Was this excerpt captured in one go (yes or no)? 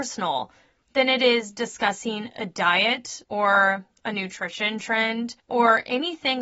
no